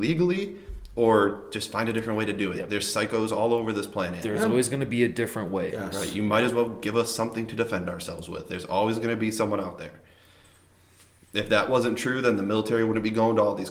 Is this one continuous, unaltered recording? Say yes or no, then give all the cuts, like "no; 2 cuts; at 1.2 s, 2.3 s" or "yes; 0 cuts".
yes; 0 cuts